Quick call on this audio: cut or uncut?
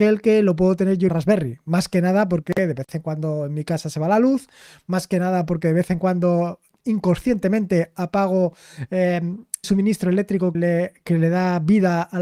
cut